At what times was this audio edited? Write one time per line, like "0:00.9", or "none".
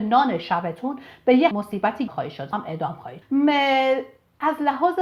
0:01.5
0:02.1
0:02.5
0:03.2